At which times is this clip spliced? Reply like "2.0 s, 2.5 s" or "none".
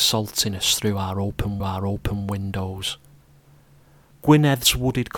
1.6 s

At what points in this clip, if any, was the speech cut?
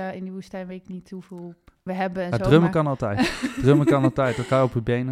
1.9 s

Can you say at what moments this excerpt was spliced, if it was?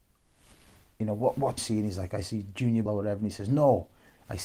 1.6 s, 2.9 s

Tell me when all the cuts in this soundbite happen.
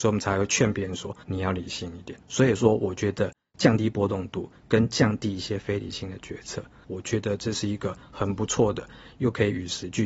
1.2 s, 2.2 s

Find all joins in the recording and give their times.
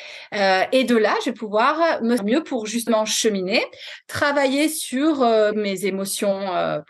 2.2 s, 5.5 s

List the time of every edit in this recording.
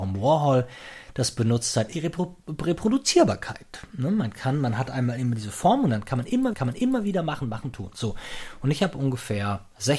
1.9 s, 6.5 s, 7.4 s

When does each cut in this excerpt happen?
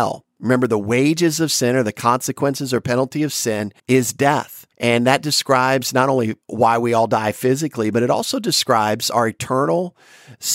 3.8 s, 4.7 s, 6.4 s

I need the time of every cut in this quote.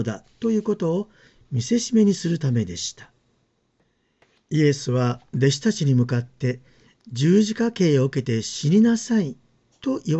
none

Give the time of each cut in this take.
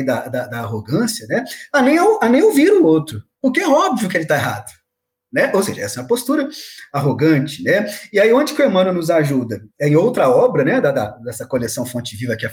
3.3 s, 9.7 s

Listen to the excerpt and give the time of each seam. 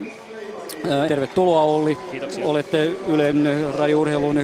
1.1 s

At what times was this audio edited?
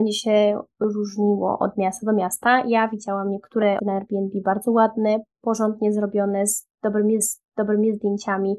3.8 s, 7.2 s

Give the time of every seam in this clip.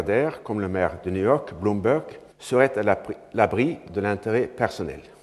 2.3 s, 3.9 s

